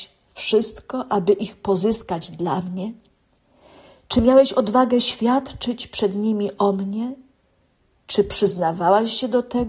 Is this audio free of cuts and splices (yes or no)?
yes